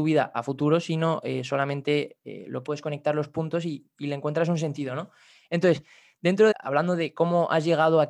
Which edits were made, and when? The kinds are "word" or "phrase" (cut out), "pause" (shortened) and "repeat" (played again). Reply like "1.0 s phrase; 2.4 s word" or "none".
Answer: 2.7 s phrase; 6.5 s word